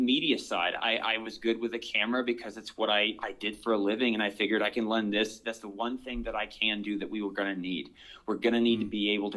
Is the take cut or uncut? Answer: uncut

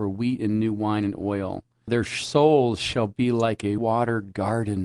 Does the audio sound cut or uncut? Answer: cut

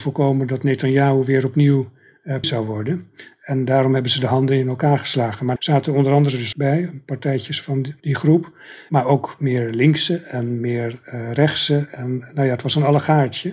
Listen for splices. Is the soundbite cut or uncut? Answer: cut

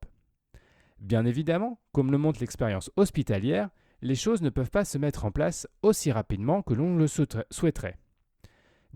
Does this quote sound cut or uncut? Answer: uncut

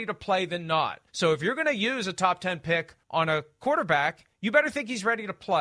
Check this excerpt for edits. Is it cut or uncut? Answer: cut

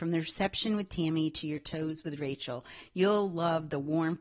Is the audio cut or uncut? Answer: uncut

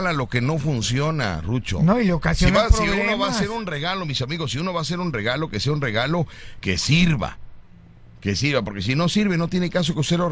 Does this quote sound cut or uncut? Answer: cut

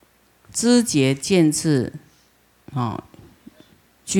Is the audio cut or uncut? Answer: uncut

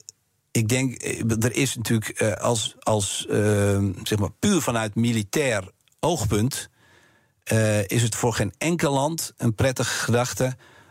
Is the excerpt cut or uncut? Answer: uncut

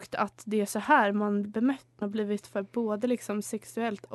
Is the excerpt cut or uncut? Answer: cut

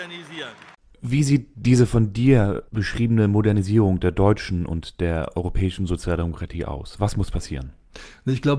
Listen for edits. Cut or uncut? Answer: cut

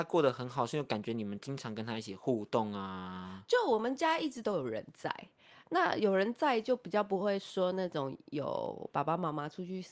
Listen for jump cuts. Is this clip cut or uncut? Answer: cut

